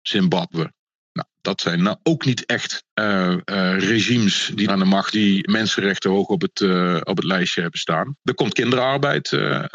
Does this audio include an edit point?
yes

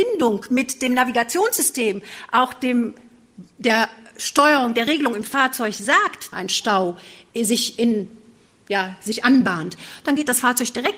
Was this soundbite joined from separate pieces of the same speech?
yes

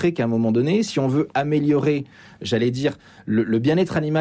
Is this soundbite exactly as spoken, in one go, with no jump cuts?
yes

